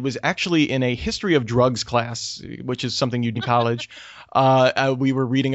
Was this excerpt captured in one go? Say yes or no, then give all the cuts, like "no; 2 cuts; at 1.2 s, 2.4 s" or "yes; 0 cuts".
no; 1 cut; at 3.3 s